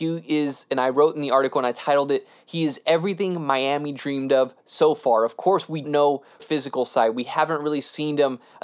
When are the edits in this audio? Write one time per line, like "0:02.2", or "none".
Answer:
0:05.8
0:06.4